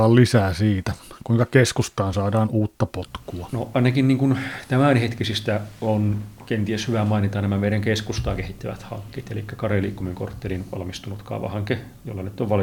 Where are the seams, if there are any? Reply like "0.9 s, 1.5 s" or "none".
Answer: none